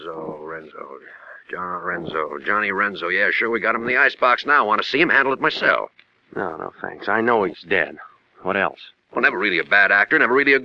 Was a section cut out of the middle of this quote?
no; 0 cuts

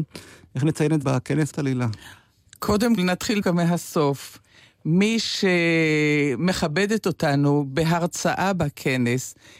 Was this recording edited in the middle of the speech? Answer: yes; 4 cuts; at 1.0 s, 1.5 s, 3.0 s, 3.4 s

